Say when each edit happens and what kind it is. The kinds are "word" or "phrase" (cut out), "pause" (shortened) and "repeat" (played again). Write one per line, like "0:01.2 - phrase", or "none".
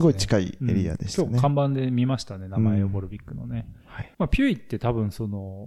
0:04.1 - pause